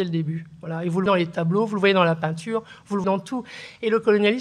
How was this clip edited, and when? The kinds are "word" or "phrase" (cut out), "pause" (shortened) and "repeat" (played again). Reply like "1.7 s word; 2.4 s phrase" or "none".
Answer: 1.1 s word; 3.0 s word